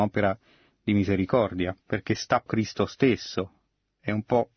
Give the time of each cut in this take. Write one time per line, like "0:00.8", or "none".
0:01.8
0:02.5